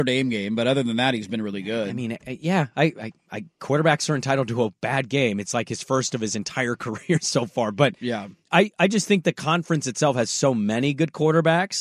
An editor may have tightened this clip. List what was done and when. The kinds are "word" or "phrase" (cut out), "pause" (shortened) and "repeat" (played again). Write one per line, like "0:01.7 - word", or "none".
none

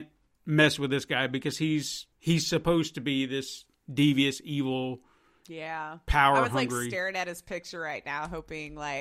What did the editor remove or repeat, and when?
0:02.1 - pause

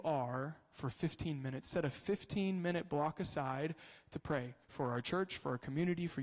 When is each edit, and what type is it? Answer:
0:04.6 - pause

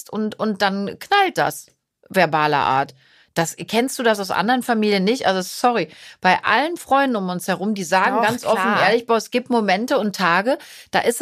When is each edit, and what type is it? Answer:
none

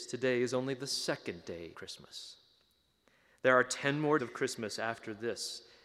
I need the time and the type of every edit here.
0:01.7 - word
0:04.2 - word

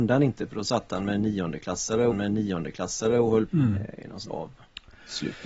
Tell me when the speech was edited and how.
0:02.1 - repeat
0:03.5 - word
0:04.3 - word

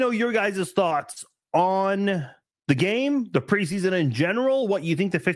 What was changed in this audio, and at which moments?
none

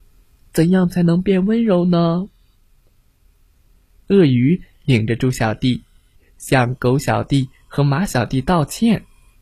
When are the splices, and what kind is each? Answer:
none

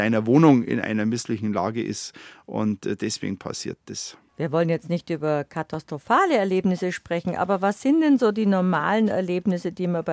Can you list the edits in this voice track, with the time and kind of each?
none

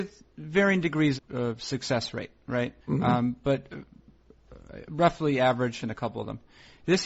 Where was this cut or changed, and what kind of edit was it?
0:01.2 - word
0:02.8 - pause
0:05.8 - phrase

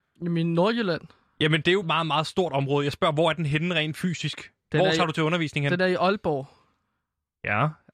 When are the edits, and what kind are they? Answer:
0:01.8 - word

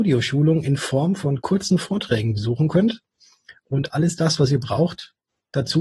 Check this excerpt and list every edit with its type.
none

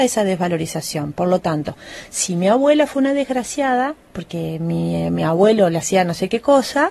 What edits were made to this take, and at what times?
0:04.0 - pause

